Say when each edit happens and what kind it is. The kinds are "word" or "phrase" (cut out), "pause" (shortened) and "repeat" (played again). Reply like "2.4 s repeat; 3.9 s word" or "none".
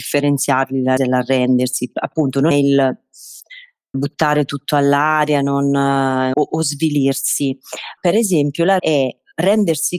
1.0 s word; 2.5 s word; 3.9 s word; 6.3 s word; 8.0 s word; 8.8 s word